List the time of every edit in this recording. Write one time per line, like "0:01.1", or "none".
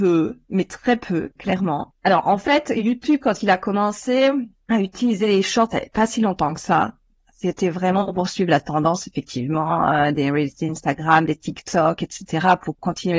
none